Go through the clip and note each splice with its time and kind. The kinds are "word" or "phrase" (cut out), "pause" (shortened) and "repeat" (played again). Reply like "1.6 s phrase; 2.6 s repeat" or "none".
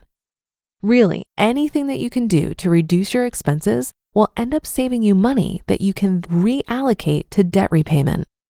6.2 s word